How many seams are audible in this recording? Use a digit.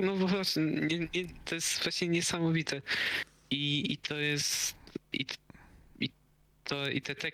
0